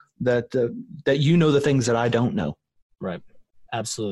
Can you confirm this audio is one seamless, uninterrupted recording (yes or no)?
yes